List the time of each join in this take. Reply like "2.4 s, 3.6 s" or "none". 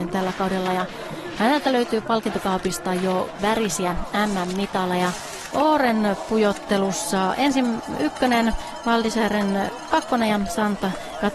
3.4 s, 5.5 s, 9.9 s

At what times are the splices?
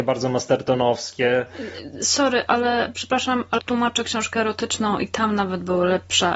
2.5 s, 3.6 s

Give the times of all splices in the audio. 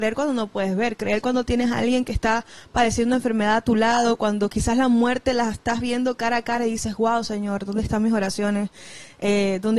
none

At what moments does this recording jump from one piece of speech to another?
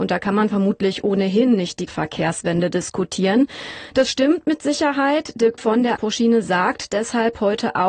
1.9 s, 5.6 s, 6.0 s

